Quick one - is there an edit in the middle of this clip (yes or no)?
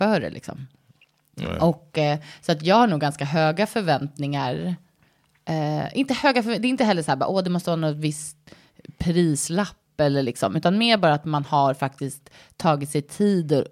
no